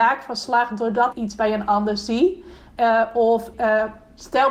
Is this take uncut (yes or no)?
no